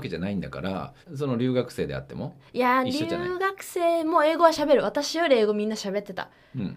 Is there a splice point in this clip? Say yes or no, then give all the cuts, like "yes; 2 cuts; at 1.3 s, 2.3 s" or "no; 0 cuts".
yes; 1 cut; at 1.0 s